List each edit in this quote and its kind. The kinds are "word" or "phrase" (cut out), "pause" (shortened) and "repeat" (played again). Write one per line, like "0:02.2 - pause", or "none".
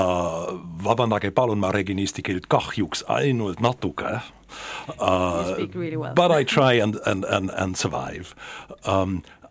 0:07.5 - word